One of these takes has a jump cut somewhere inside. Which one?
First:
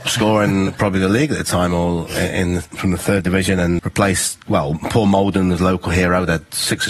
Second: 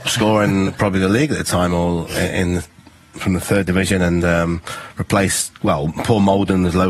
first; 2 cuts; at 2.7 s, 3.8 s

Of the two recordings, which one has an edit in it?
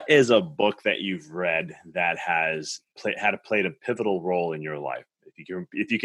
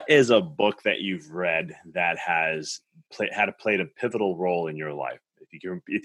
first; 1 cut; at 2.9 s

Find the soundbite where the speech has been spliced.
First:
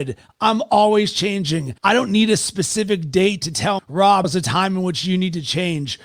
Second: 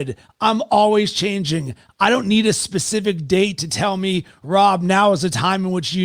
first; 3 cuts; at 1.8 s, 3.8 s, 4.2 s

